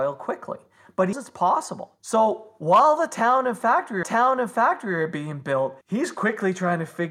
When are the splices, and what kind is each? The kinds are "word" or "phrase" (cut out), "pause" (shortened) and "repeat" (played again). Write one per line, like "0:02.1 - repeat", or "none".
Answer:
0:01.1 - word
0:02.0 - pause
0:04.0 - repeat
0:05.8 - pause